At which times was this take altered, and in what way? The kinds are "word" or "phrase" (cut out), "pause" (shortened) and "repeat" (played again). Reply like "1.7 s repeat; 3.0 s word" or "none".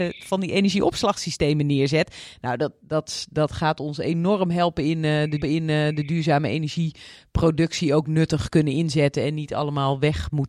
5.4 s repeat